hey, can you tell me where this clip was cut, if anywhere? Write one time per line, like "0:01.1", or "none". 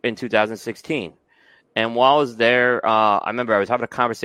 none